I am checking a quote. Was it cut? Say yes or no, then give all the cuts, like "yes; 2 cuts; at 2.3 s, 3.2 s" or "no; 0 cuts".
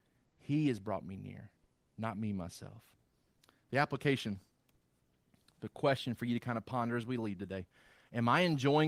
no; 0 cuts